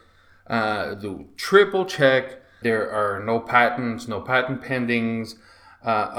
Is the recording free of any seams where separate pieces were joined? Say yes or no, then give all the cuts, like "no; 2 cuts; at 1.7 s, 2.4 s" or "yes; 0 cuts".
no; 1 cut; at 2.6 s